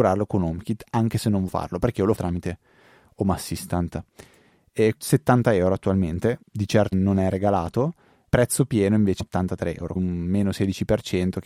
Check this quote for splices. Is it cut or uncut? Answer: cut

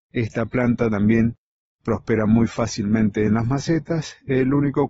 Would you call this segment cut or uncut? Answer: uncut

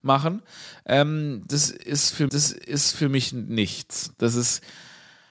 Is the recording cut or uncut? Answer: cut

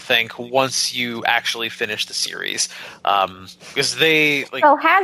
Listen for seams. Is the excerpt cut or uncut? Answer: uncut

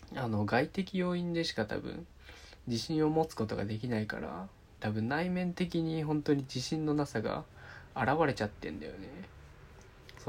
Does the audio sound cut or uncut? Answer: uncut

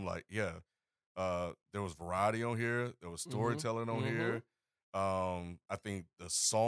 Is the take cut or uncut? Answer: uncut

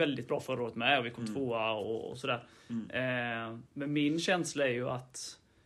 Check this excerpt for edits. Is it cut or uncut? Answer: cut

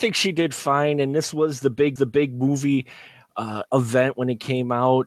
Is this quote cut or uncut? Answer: cut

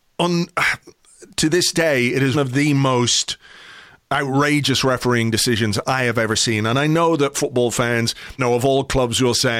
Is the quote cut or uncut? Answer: cut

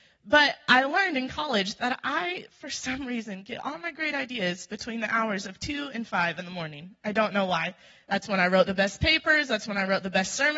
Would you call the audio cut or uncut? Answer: uncut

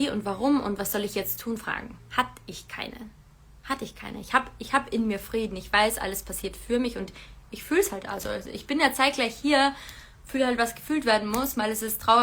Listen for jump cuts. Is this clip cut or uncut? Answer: uncut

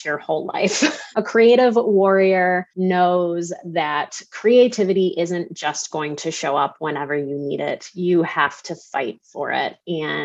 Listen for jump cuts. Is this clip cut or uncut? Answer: cut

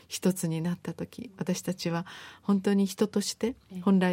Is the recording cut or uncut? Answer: uncut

